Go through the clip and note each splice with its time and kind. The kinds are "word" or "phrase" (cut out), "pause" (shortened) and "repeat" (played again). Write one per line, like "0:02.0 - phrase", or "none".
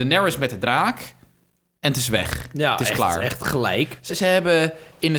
0:04.1 - word